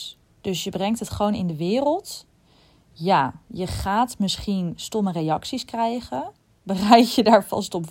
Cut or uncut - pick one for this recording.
uncut